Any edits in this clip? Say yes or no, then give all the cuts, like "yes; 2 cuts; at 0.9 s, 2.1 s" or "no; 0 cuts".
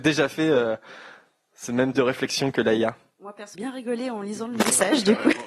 yes; 2 cuts; at 1.9 s, 3.5 s